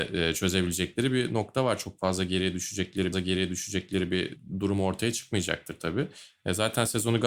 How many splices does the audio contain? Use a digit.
1